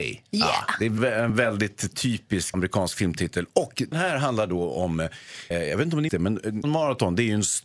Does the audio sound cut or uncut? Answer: cut